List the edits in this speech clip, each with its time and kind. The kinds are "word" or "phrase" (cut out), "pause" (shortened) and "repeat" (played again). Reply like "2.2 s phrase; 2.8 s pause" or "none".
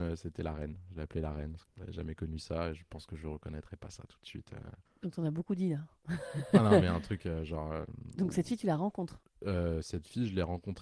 none